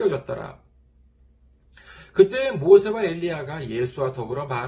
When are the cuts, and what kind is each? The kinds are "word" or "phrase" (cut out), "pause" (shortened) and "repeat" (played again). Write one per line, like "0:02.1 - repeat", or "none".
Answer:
none